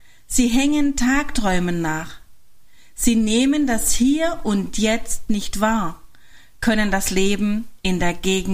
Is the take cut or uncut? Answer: uncut